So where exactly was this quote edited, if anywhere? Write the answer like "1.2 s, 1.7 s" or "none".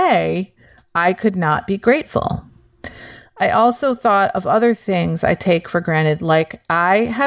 none